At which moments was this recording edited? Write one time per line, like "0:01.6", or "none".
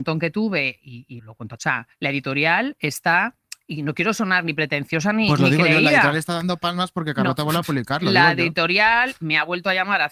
0:01.2
0:01.6